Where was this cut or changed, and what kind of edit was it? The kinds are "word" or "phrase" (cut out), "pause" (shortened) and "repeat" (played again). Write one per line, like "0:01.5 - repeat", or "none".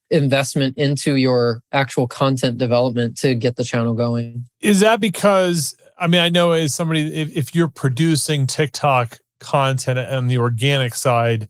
0:04.5 - pause